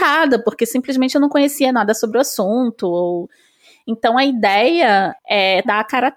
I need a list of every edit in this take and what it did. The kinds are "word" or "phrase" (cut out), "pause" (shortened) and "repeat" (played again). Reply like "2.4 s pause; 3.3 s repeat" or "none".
none